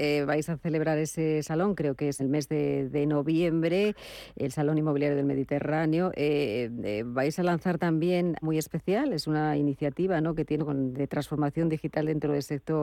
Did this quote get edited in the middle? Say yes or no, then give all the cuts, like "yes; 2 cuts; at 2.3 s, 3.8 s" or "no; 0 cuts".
yes; 4 cuts; at 2.2 s, 8.4 s, 10.6 s, 10.9 s